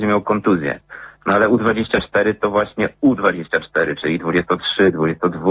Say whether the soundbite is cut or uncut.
uncut